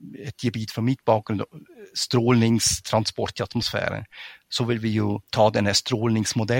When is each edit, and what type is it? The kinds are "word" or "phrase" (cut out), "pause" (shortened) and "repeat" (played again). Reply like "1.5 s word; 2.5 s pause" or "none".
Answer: 5.2 s pause